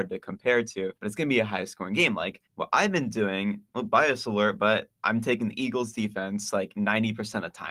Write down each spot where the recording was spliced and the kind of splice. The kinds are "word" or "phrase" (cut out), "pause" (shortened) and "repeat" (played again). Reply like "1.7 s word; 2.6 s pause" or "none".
1.0 s pause; 2.5 s pause; 3.7 s pause